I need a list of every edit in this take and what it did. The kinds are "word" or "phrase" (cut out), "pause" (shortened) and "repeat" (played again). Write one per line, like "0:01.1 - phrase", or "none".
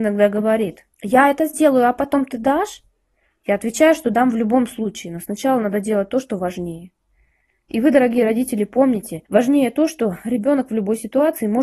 0:00.9 - pause
0:09.3 - pause